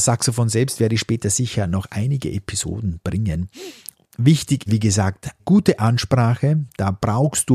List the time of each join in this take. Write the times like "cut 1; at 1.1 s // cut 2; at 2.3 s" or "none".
cut 1; at 4.7 s // cut 2; at 5.4 s